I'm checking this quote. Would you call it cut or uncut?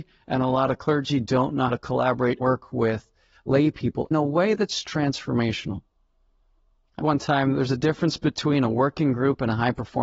cut